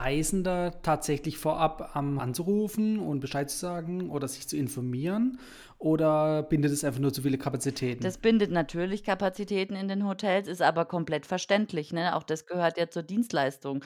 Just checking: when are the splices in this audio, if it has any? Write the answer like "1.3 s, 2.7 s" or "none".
2.2 s